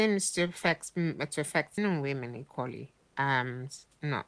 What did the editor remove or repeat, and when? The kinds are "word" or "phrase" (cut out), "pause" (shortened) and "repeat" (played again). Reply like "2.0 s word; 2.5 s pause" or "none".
1.8 s word